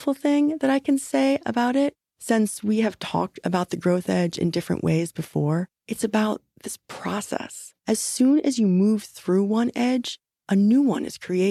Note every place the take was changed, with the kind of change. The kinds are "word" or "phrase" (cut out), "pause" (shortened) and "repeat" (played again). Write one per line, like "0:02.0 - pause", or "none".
0:02.1 - pause
0:05.8 - pause
0:07.8 - pause